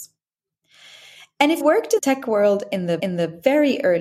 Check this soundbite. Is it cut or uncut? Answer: cut